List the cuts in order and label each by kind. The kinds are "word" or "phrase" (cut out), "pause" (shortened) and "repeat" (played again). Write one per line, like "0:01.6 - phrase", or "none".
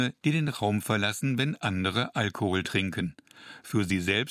none